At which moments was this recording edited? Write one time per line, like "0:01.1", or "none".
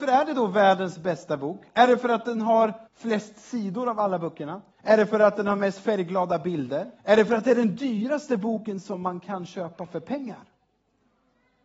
0:02.9
0:04.7
0:07.0